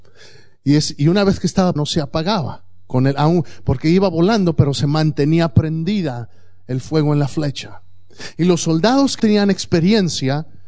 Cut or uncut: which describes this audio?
cut